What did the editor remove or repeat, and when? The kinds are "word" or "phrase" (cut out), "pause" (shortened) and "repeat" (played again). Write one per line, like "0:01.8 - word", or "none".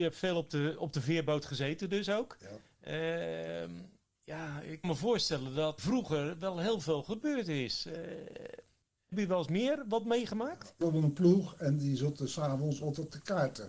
0:04.8 - word
0:05.8 - word
0:09.1 - word
0:10.8 - phrase